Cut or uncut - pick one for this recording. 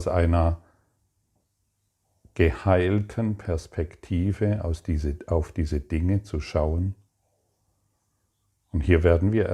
uncut